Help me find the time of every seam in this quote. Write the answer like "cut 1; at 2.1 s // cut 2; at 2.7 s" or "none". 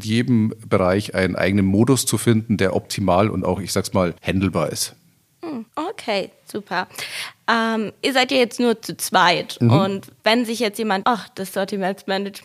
cut 1; at 4.2 s // cut 2; at 5.7 s // cut 3; at 10.2 s // cut 4; at 11.0 s